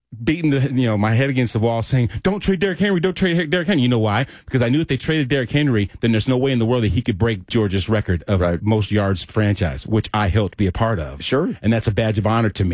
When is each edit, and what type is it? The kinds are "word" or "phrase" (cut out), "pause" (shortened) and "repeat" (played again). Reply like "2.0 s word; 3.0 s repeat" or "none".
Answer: 7.5 s word; 9.3 s word